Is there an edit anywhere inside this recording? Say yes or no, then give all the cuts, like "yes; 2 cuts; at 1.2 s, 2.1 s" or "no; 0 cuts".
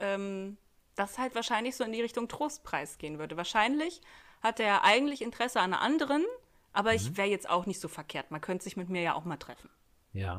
no; 0 cuts